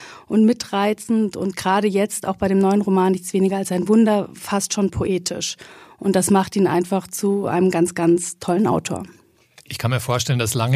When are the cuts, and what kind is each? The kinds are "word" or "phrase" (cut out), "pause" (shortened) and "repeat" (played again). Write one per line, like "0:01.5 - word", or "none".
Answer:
none